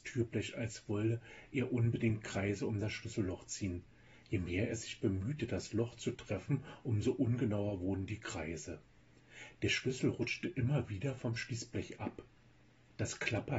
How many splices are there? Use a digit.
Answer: 0